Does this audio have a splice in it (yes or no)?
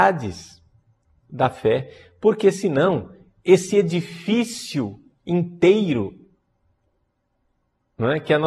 no